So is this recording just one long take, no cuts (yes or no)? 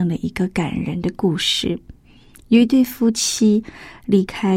yes